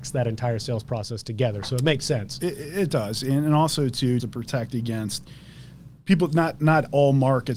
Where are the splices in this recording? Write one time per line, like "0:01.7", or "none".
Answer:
0:04.2